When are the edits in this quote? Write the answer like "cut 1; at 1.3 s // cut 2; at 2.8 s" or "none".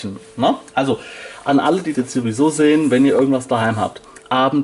cut 1; at 1.9 s